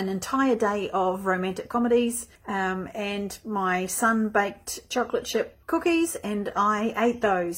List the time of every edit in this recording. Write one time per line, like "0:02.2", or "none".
0:02.4
0:05.6